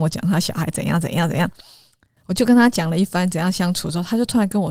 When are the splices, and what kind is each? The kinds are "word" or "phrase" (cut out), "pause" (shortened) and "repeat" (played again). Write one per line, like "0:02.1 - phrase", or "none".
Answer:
none